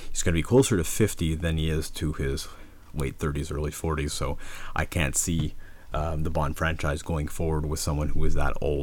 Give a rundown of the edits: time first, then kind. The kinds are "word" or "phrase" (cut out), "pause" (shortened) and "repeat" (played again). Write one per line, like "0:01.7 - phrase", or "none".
none